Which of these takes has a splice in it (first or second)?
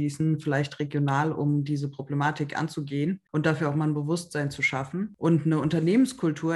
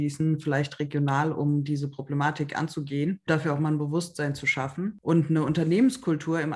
second